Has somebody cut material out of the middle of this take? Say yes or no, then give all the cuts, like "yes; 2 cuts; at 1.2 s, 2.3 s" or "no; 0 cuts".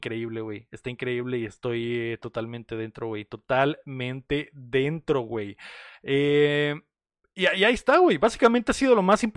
yes; 1 cut; at 7.0 s